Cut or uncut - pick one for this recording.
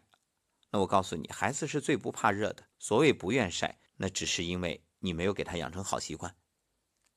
cut